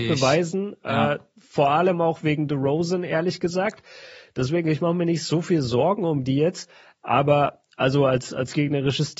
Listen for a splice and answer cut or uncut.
uncut